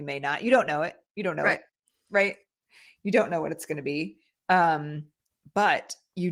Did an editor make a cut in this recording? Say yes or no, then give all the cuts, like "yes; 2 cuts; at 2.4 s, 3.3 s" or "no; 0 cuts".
no; 0 cuts